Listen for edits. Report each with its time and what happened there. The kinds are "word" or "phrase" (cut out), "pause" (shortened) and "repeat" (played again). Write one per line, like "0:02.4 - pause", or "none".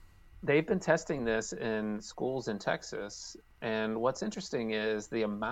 none